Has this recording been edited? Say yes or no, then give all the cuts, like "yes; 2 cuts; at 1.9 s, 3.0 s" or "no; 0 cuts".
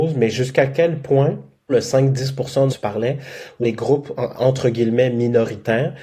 yes; 4 cuts; at 1.7 s, 2.7 s, 3.6 s, 4.3 s